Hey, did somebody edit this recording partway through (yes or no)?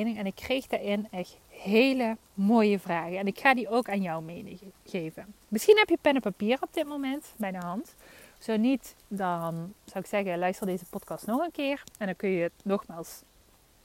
yes